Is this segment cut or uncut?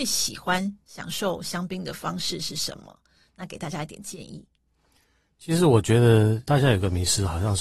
cut